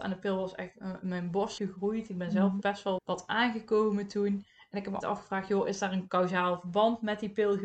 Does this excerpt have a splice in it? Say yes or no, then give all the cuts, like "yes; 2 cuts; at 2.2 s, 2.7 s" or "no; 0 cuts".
yes; 4 cuts; at 1.6 s, 2.6 s, 3.0 s, 5.0 s